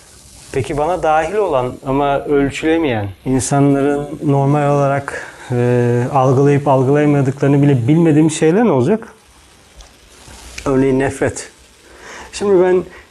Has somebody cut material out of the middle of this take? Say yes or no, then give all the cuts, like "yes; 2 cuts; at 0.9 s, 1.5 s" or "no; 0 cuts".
yes; 1 cut; at 3.2 s